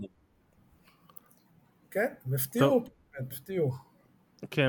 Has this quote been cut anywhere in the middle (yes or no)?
yes